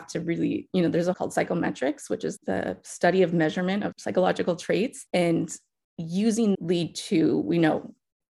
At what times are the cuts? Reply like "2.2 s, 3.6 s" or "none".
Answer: 1.1 s, 2.4 s, 3.9 s, 6.5 s